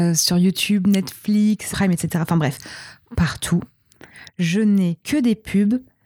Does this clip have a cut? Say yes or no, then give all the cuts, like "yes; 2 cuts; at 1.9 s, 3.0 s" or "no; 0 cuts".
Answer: yes; 2 cuts; at 1.7 s, 5.0 s